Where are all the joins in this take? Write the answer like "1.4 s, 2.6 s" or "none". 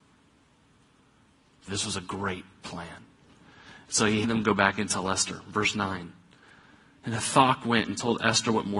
1.7 s, 4.2 s